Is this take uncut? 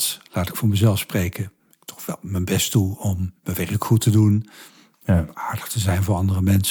yes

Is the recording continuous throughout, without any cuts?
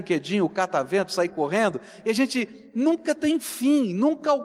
yes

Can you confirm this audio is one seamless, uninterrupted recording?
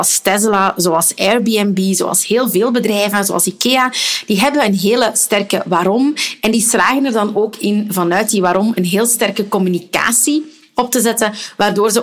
yes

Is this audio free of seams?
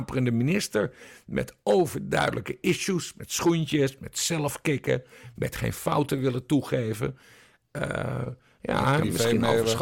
yes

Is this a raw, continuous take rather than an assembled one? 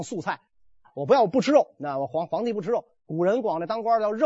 yes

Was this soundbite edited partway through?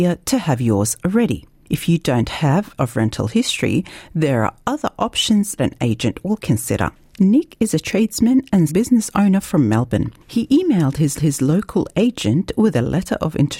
yes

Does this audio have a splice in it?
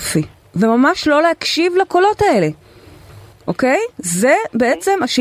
yes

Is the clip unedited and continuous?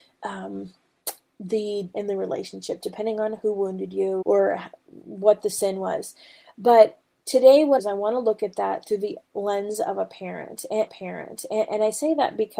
no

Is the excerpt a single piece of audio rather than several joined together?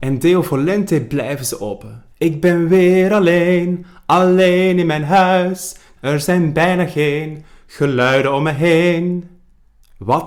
no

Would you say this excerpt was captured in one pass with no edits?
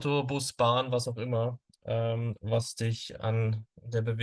yes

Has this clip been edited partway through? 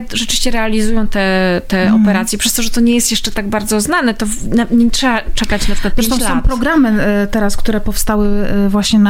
no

